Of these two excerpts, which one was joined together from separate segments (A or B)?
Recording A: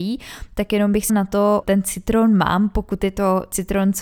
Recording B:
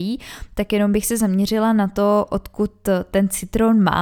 A